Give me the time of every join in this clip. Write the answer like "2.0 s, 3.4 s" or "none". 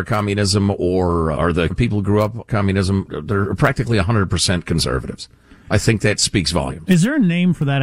1.3 s, 1.7 s, 2.5 s, 3.1 s